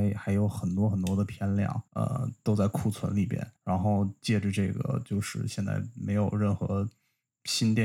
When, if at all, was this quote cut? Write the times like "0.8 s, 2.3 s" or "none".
1.9 s, 3.6 s